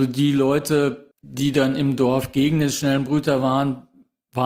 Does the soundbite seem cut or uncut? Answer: cut